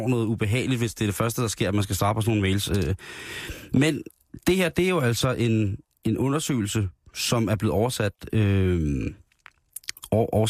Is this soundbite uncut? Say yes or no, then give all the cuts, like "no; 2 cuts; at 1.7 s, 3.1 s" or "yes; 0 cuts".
yes; 0 cuts